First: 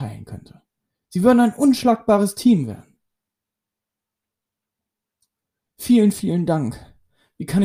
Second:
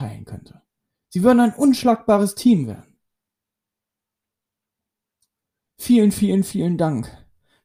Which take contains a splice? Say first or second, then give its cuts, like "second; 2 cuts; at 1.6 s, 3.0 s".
first; 1 cut; at 6.1 s